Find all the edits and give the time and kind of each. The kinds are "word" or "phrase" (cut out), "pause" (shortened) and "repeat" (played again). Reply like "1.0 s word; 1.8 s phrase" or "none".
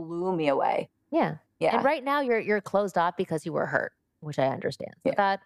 none